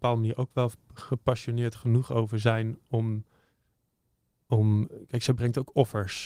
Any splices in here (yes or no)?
no